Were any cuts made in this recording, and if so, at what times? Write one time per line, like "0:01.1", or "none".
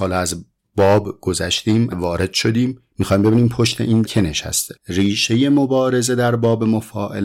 0:01.9
0:02.9
0:04.0
0:04.8